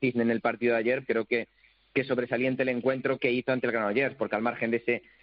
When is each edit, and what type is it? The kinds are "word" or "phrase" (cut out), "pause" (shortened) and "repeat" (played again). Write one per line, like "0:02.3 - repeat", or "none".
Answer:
0:01.0 - word
0:03.2 - word

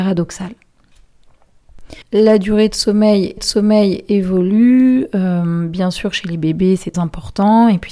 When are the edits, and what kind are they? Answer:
0:02.0 - pause
0:03.4 - repeat
0:06.9 - word

